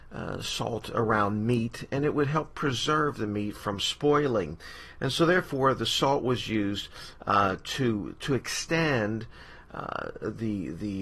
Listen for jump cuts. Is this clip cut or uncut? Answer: uncut